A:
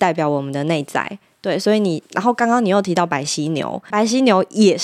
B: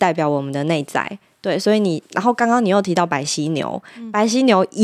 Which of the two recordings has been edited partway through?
A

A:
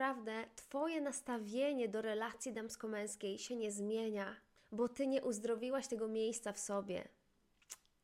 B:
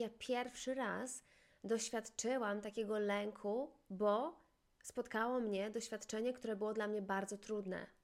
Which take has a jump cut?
A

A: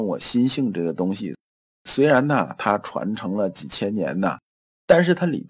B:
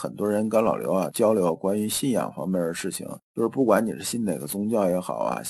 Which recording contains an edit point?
B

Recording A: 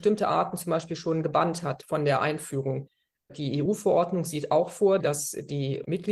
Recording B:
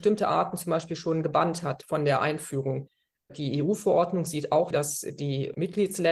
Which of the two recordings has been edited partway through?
B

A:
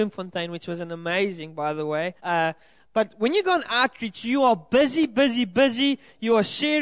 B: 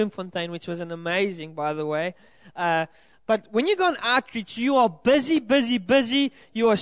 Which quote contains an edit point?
A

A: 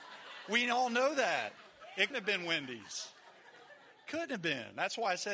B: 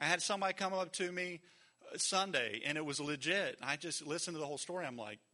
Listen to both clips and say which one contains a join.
A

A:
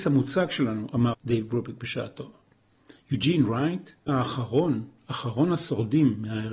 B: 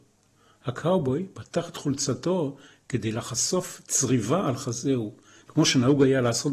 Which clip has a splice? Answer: A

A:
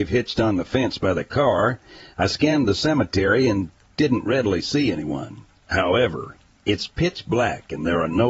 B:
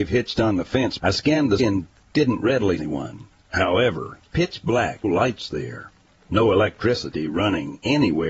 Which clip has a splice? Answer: B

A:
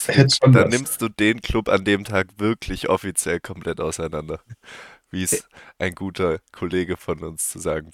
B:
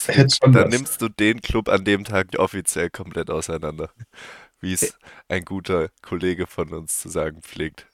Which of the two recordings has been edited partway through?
B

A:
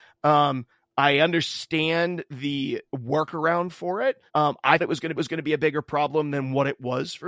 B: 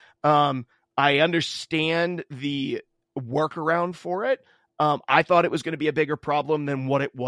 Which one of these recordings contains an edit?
A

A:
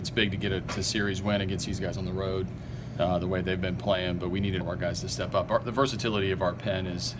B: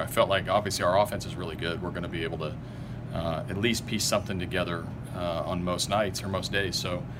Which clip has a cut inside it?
A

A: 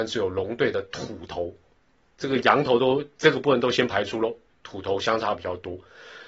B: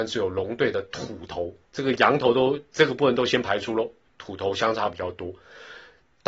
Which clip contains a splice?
B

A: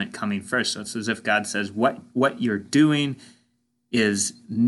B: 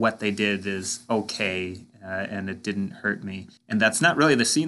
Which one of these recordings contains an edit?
B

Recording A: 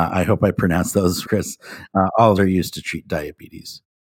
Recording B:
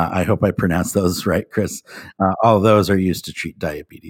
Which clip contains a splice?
A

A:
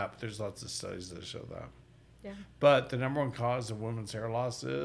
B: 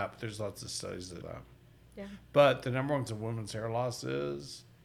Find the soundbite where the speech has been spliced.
B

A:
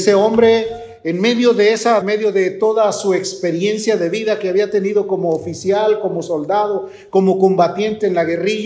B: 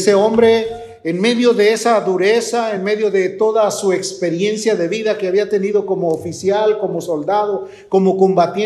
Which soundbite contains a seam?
A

